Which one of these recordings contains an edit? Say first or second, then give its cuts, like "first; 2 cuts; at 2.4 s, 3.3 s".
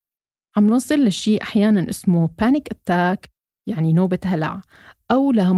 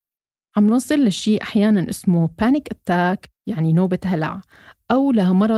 second; 1 cut; at 3.4 s